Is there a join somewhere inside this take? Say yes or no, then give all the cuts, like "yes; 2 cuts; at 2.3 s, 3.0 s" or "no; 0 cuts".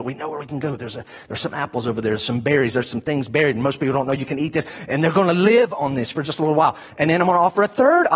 no; 0 cuts